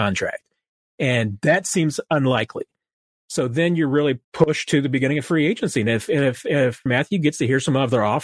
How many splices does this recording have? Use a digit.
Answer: 2